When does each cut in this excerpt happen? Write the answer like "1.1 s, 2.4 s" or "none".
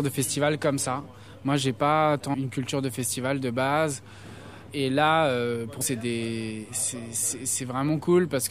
2.3 s, 5.8 s